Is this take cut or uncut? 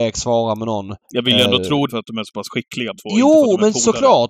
cut